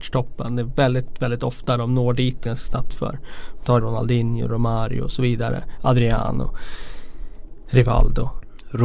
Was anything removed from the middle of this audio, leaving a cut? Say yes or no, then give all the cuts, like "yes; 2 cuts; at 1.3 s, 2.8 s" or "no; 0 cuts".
yes; 3 cuts; at 2.4 s, 2.9 s, 3.8 s